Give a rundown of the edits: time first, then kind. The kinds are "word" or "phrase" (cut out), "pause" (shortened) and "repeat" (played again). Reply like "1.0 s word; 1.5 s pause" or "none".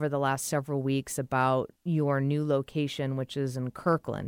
1.8 s pause

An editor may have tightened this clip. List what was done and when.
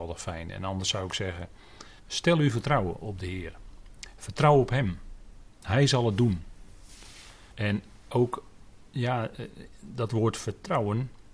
2.0 s pause; 5.5 s pause; 7.5 s pause; 8.9 s pause

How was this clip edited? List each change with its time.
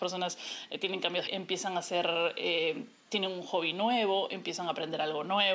1.3 s phrase

